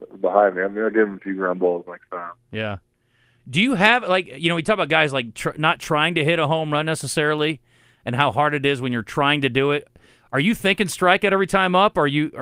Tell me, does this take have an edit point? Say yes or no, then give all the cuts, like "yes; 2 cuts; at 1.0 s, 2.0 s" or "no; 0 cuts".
no; 0 cuts